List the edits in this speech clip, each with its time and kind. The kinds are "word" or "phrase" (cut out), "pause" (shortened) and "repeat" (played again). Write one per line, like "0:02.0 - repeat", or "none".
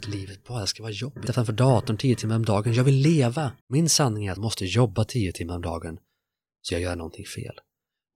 0:01.3 - phrase
0:03.6 - pause
0:04.4 - phrase
0:06.7 - word